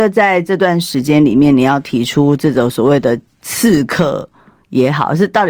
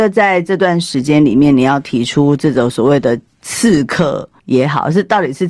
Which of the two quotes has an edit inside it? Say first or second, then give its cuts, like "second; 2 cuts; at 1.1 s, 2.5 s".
second; 1 cut; at 4.4 s